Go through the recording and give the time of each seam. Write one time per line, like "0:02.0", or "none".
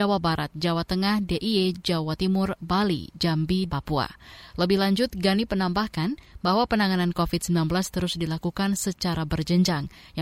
0:03.7